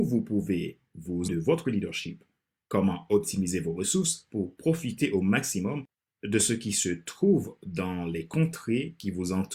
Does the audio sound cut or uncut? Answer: cut